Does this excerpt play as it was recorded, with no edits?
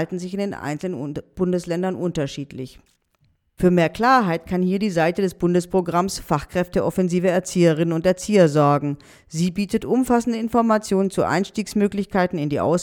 yes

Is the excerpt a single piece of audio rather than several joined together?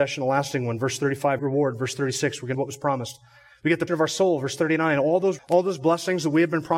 no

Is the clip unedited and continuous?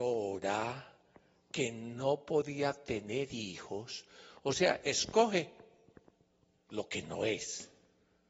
yes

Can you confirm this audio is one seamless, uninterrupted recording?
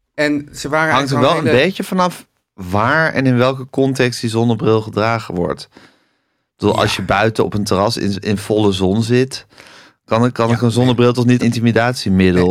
no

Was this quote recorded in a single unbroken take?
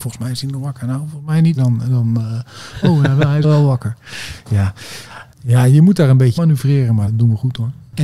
no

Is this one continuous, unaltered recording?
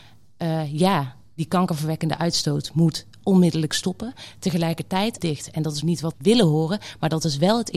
no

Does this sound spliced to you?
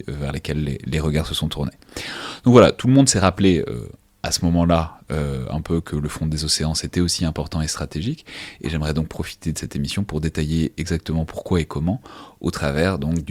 no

